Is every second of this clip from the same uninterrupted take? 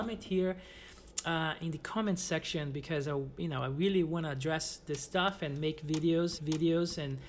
no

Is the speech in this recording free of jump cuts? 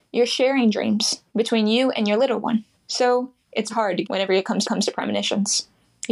no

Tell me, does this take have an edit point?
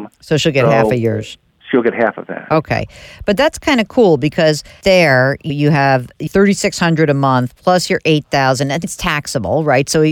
yes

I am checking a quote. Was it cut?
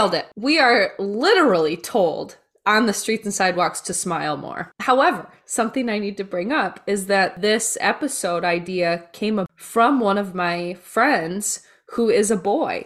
no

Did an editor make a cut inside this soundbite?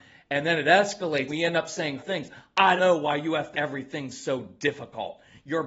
yes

